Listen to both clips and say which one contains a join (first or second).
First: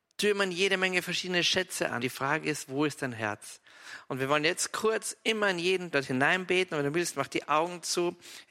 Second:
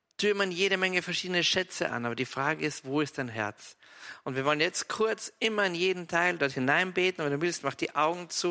first